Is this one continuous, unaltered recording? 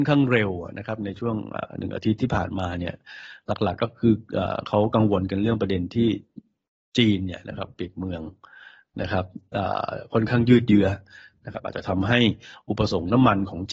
yes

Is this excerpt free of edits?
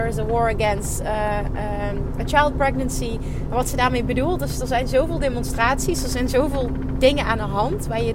yes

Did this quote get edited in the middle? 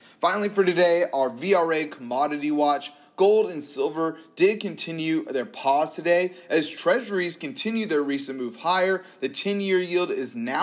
no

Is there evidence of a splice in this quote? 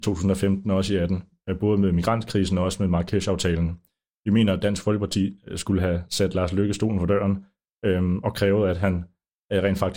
no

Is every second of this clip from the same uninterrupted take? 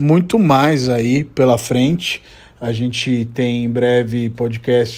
yes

